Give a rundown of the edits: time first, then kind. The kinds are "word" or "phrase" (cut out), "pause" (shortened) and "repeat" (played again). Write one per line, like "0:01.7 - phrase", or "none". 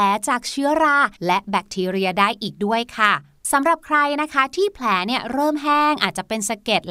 0:01.1 - pause